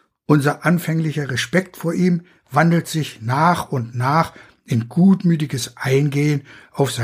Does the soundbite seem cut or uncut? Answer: uncut